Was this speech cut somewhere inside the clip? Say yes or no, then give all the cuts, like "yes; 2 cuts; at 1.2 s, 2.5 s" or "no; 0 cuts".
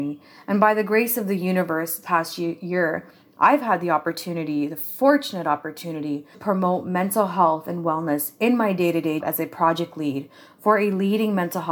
yes; 3 cuts; at 2.0 s, 6.3 s, 9.2 s